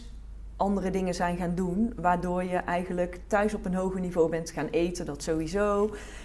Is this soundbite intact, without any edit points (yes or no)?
yes